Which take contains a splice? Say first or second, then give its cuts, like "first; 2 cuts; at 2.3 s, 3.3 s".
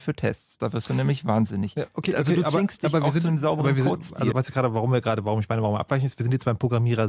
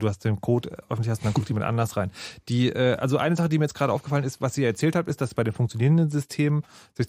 first; 1 cut; at 4.3 s